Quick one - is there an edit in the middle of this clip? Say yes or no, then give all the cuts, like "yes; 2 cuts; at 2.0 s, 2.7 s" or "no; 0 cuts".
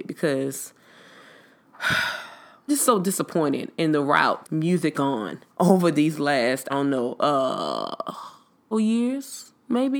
yes; 6 cuts; at 2.7 s, 4.4 s, 4.9 s, 5.5 s, 6.7 s, 8.7 s